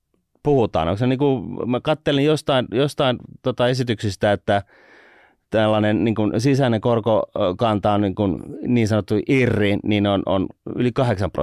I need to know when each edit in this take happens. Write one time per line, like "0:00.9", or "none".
none